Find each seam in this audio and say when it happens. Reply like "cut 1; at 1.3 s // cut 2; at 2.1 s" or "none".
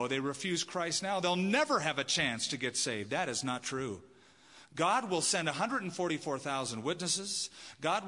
none